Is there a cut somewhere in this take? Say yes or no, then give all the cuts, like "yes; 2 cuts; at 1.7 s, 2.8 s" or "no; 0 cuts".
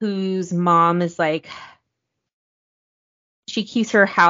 no; 0 cuts